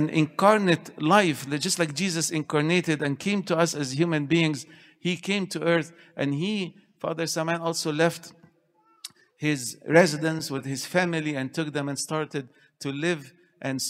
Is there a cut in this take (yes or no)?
no